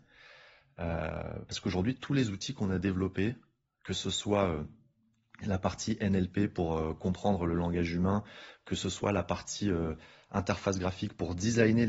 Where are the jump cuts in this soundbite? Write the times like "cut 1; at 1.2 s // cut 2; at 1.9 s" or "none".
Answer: none